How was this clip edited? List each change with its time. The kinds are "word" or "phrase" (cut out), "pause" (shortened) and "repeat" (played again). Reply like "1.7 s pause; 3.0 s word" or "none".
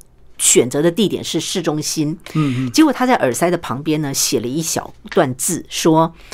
none